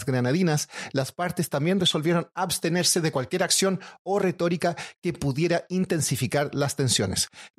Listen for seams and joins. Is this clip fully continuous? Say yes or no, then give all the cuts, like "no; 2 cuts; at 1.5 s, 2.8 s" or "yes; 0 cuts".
yes; 0 cuts